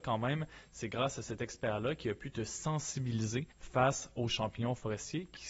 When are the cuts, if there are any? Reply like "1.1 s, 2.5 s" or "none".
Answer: 3.5 s